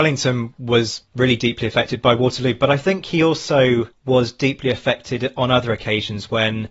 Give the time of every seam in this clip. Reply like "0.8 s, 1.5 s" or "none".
3.9 s